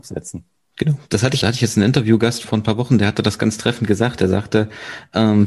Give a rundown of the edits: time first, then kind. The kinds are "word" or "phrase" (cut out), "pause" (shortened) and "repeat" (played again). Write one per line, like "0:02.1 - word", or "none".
0:01.4 - word
0:02.4 - word